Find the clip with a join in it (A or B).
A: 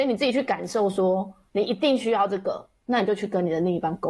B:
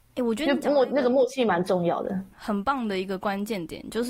B